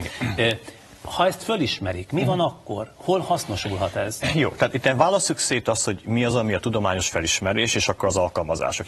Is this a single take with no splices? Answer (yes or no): yes